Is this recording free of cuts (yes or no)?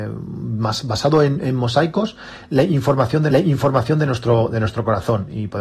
no